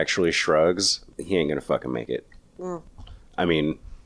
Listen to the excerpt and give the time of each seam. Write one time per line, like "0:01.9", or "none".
0:01.1